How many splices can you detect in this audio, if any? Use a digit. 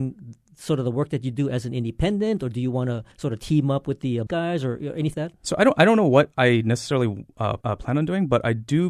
4